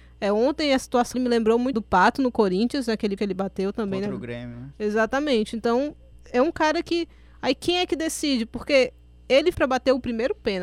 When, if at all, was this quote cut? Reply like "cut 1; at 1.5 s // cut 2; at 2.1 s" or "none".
cut 1; at 1.1 s // cut 2; at 1.7 s // cut 3; at 3.2 s // cut 4; at 6.1 s // cut 5; at 9.5 s